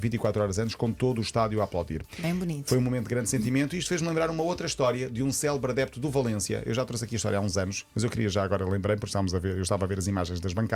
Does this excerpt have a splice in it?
no; 0 cuts

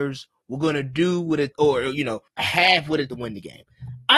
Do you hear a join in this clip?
yes; 3 cuts; at 1.5 s, 2.3 s, 3.1 s

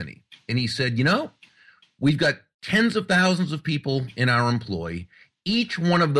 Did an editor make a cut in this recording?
no; 0 cuts

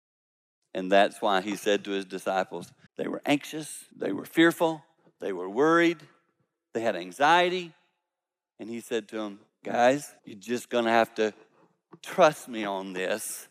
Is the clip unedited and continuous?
no; 3 cuts; at 2.9 s, 3.9 s, 10.2 s

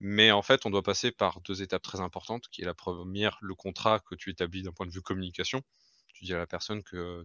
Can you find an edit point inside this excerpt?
no; 0 cuts

